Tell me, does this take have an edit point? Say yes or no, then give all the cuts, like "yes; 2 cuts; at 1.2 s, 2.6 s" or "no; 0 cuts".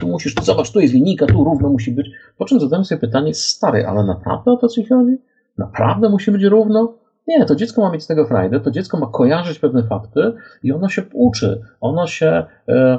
no; 0 cuts